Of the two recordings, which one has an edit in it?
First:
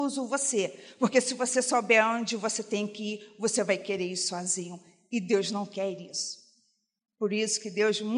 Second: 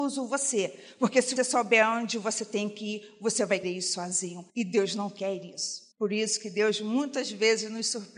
second; 4 cuts; at 1.4 s, 3.6 s, 4.5 s, 5.9 s

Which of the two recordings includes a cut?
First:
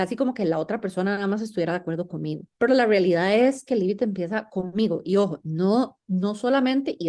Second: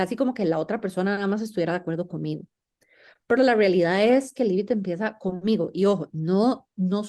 first; 1 cut; at 2.5 s

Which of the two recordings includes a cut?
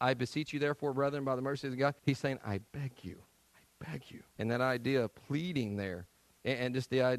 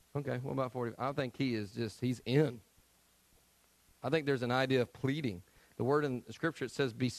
first; 3 cuts; at 2.0 s, 3.5 s, 4.3 s

